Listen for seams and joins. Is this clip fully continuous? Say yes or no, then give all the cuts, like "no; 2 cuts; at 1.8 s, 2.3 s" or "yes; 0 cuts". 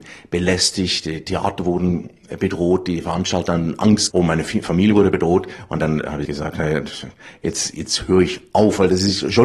no; 2 cuts; at 4.1 s, 6.3 s